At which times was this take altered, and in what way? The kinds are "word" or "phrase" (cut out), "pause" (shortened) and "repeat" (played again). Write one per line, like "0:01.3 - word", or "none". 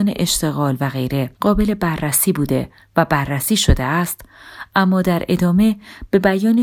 0:01.3 - pause